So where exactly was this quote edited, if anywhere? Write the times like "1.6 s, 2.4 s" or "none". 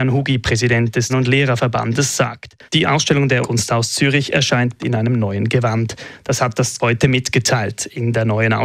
1.1 s, 2.7 s, 3.4 s, 4.8 s, 6.8 s